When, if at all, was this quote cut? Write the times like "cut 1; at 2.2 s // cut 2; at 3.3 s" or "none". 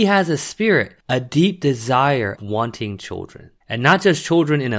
cut 1; at 1.0 s // cut 2; at 2.4 s // cut 3; at 3.6 s